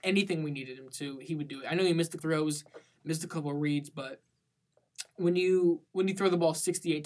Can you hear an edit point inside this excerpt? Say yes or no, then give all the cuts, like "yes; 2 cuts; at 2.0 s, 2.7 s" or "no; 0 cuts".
yes; 2 cuts; at 2.2 s, 5.9 s